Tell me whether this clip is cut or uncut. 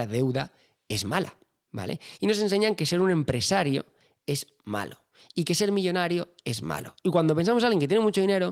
uncut